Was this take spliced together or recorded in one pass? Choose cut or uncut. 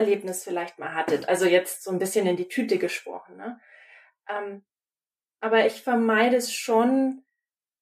uncut